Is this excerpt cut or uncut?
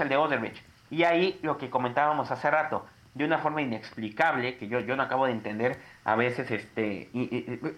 uncut